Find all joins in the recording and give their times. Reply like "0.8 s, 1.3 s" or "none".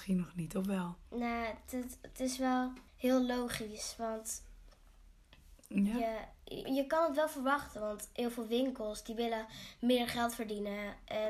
2.9 s, 5.6 s, 6.6 s